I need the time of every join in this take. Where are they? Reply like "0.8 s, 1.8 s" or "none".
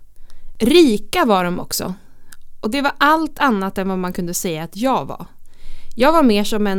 none